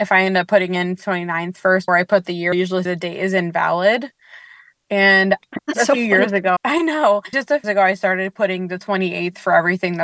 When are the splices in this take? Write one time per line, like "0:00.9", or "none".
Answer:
0:01.0
0:01.9
0:02.5
0:02.8
0:05.7
0:06.6
0:07.3
0:07.6

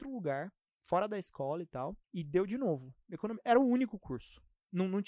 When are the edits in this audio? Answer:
0:02.0

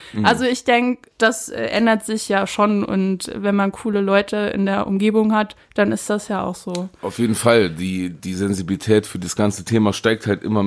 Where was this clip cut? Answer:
0:01.1
0:05.6

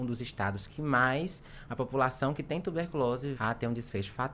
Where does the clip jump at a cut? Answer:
0:03.3

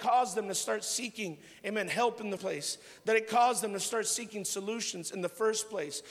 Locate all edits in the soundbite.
0:02.4

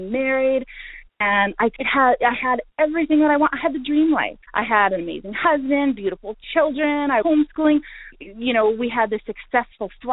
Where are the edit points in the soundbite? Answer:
0:04.5
0:07.2
0:08.1

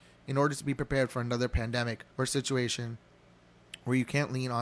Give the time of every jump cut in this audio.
0:02.1

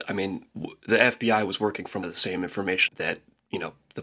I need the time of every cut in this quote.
0:02.0
0:02.9

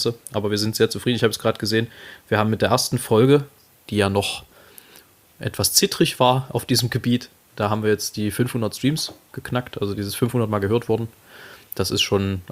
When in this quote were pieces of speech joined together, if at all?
0:09.3

